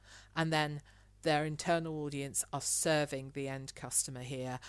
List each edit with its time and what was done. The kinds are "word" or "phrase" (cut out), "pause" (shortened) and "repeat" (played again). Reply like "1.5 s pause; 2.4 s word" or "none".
none